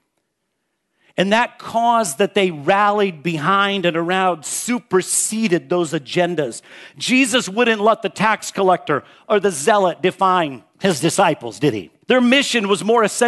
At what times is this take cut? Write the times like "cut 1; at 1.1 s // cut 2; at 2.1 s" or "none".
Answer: cut 1; at 10.7 s // cut 2; at 12.0 s